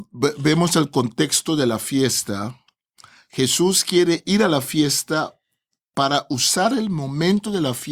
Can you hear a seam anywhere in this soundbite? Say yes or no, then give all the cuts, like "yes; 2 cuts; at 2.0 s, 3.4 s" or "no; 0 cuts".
no; 0 cuts